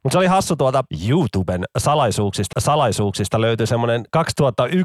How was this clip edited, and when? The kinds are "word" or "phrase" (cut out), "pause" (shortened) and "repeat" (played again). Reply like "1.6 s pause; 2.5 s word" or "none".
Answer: 2.5 s repeat